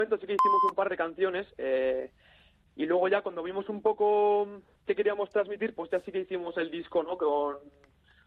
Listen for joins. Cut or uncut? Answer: uncut